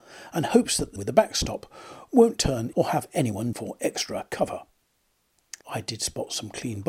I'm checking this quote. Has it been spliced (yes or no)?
yes